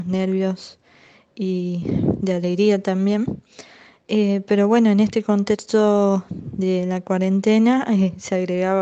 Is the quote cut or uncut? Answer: uncut